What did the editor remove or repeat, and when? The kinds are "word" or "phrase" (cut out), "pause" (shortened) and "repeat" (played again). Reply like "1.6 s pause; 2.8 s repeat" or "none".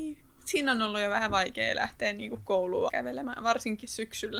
2.9 s word